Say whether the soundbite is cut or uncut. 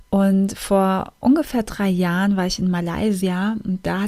uncut